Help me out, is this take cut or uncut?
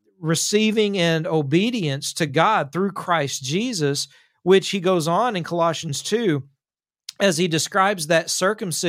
uncut